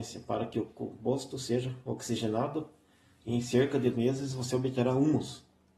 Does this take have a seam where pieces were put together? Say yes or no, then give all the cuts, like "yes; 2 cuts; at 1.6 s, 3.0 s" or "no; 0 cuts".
yes; 1 cut; at 3.9 s